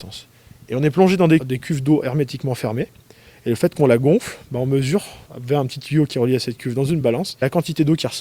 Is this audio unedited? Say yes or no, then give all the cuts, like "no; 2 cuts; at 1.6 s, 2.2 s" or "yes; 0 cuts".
yes; 0 cuts